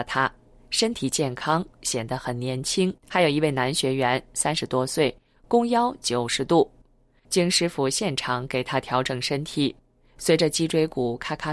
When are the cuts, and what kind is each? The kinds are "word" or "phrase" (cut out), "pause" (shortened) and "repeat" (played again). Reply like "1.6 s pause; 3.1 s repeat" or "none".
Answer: 3.0 s pause